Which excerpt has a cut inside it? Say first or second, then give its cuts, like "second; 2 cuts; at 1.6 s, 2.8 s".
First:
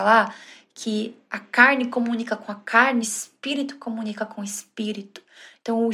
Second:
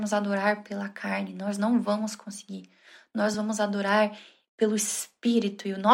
first; 1 cut; at 3.0 s